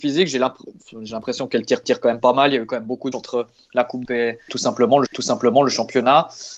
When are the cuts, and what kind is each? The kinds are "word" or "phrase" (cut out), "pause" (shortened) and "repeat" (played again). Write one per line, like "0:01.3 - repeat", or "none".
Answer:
0:01.8 - repeat
0:03.1 - word
0:04.0 - word
0:05.1 - repeat